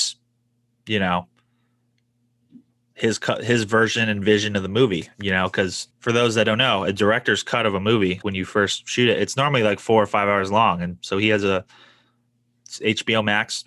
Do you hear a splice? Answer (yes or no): yes